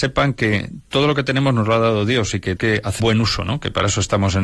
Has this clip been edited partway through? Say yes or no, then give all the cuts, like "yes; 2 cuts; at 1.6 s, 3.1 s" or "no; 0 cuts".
yes; 2 cuts; at 2.6 s, 3.0 s